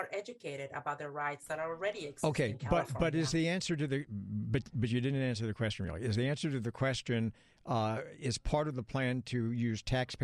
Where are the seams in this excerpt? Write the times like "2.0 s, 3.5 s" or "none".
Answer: none

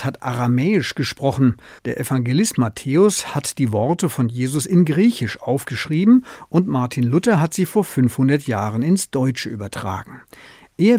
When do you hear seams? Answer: 1.8 s

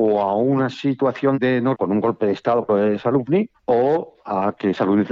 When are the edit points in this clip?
1.7 s, 2.7 s

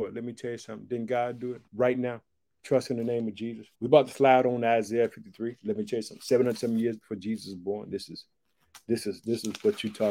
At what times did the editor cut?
1.7 s, 3.7 s

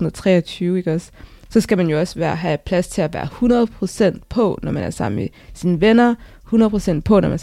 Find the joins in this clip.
none

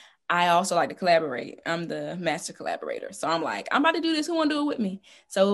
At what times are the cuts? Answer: none

